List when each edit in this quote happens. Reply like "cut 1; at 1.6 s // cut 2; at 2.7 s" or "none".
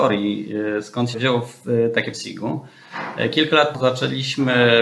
cut 1; at 1.1 s // cut 2; at 2.1 s // cut 3; at 3.7 s